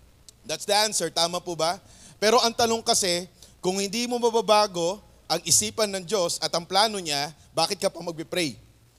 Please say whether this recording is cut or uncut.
uncut